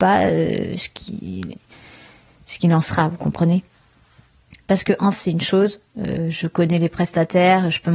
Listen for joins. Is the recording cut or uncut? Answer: cut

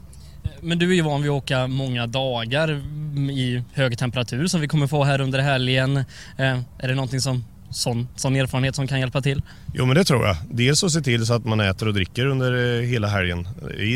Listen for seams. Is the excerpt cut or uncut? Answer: uncut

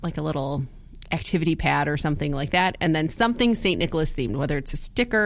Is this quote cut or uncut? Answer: uncut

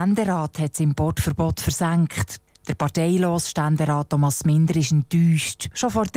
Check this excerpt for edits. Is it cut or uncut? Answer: uncut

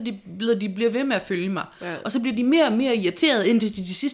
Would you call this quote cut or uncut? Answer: uncut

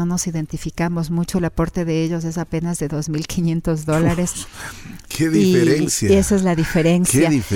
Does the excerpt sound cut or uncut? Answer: uncut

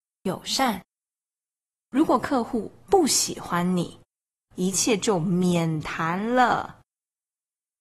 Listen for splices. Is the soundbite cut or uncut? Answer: uncut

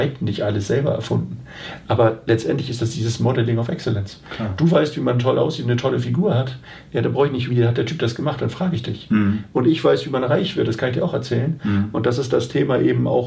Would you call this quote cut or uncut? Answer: cut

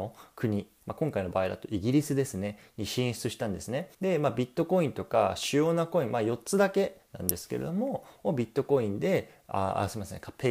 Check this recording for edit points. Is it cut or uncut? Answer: cut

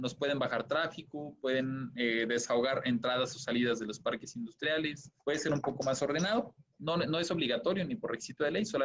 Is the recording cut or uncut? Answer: cut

